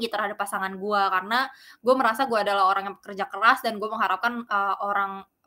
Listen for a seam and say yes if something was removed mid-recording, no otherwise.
no